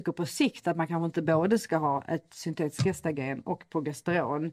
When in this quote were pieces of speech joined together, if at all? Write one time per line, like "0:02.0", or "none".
none